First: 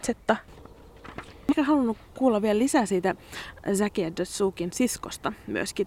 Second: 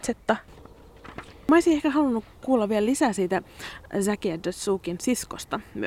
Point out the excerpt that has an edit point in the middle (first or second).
first